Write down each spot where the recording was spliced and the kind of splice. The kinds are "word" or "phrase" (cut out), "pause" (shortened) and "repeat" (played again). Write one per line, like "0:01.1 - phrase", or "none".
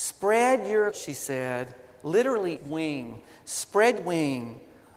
0:00.9 - word
0:02.6 - word
0:04.0 - word